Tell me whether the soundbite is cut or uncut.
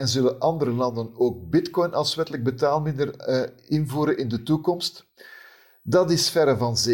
uncut